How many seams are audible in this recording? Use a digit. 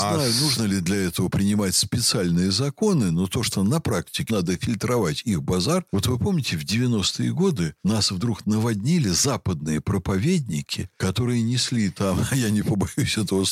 1